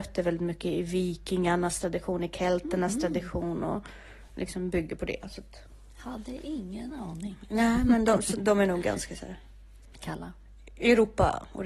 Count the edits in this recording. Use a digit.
2